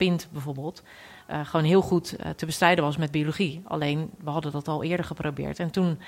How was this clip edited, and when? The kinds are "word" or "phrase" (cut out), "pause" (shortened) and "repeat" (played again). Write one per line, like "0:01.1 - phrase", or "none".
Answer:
none

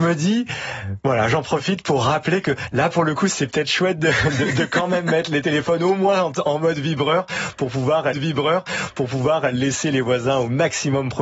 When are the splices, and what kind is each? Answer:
0:08.1 - repeat

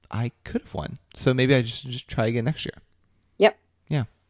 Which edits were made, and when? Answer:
none

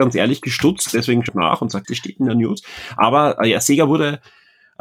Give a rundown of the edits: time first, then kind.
0:01.3 - word
0:01.8 - word

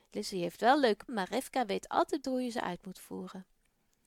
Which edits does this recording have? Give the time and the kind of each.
0:01.1 - word
0:02.2 - word

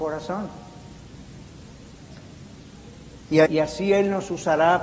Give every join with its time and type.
0:03.5 - word

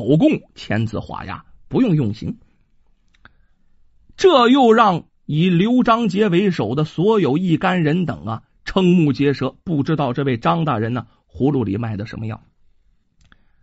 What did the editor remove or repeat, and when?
none

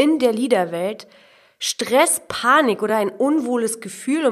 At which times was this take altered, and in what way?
none

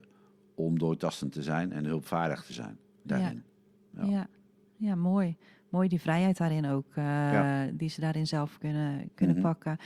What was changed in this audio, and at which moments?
none

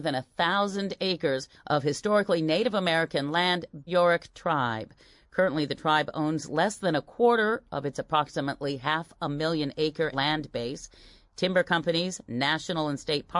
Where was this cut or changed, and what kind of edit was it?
0:01.5 - pause
0:03.9 - phrase
0:10.1 - word

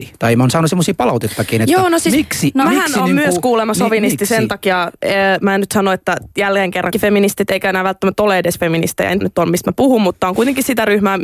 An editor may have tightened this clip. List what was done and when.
0:06.3 - pause
0:06.9 - word
0:09.2 - phrase

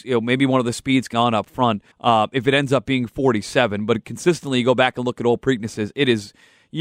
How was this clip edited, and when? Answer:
0:01.1 - word
0:01.9 - pause

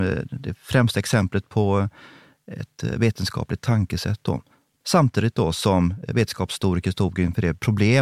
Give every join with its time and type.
none

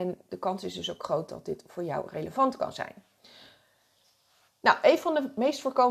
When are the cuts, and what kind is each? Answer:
none

